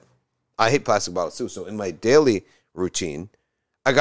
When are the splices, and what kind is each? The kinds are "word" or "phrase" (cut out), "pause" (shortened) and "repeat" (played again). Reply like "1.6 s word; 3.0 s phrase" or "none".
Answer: none